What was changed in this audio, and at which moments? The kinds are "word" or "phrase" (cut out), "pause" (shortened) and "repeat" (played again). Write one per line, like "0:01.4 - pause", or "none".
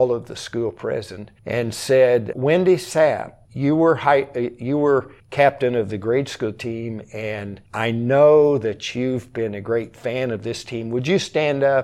0:01.4 - pause
0:02.3 - word
0:03.4 - word
0:05.2 - pause
0:07.7 - pause